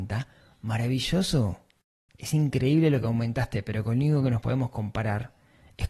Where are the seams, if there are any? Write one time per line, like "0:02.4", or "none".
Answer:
none